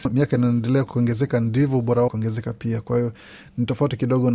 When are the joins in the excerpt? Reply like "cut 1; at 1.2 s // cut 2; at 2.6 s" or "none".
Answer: cut 1; at 2.1 s